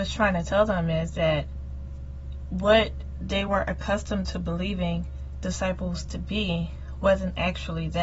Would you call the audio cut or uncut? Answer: uncut